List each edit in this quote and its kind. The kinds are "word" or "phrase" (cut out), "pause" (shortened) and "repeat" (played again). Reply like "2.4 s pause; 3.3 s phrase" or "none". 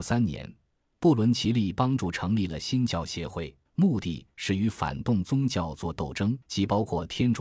3.7 s pause; 6.4 s pause